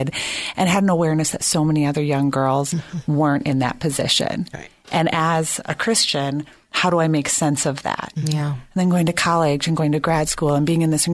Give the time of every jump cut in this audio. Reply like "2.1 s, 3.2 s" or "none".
none